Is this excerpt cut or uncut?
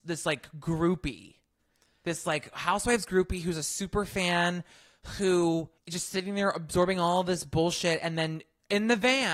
cut